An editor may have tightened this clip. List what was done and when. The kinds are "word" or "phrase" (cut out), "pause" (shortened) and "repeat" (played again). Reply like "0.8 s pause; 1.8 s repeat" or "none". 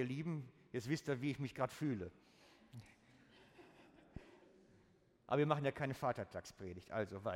none